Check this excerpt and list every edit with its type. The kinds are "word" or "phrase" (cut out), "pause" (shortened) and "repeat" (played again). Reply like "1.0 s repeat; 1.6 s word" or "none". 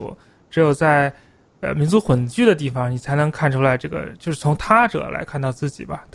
none

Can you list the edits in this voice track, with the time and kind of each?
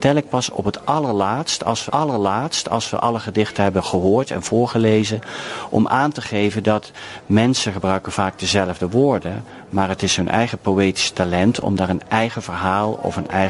1.9 s repeat

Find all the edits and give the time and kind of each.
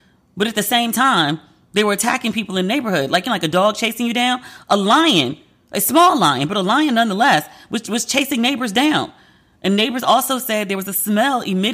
none

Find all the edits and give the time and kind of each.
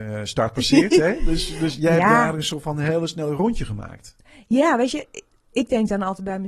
none

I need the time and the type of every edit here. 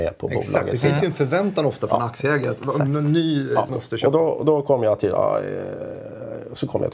3.7 s phrase

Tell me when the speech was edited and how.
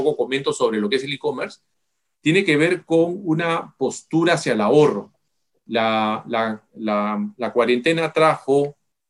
none

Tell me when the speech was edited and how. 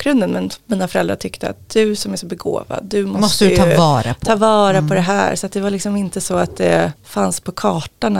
7.0 s pause

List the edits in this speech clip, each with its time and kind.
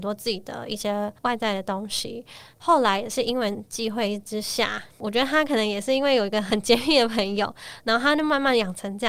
1.2 s pause

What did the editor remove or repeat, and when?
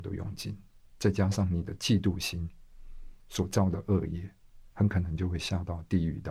4.7 s pause

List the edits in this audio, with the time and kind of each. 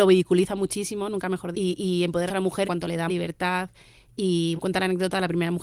1.5 s word; 2.3 s word; 2.6 s word; 3.1 s word; 4.6 s word

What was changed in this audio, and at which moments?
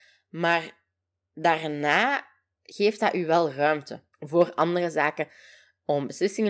4.1 s pause

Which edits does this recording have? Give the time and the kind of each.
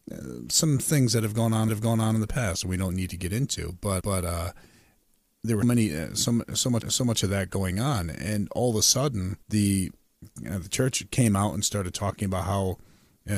1.7 s repeat; 4.0 s repeat; 5.6 s word; 6.8 s repeat; 9.4 s pause

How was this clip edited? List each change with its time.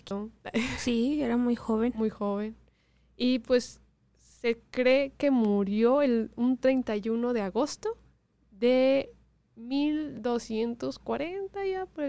none

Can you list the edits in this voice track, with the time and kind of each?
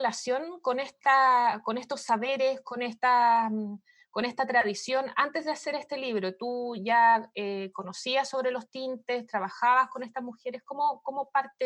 none

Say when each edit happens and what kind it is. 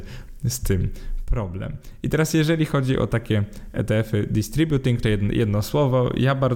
5.0 s phrase

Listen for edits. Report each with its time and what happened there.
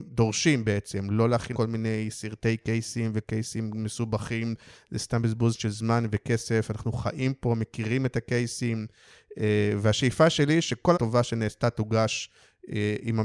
1.5 s word; 10.9 s word

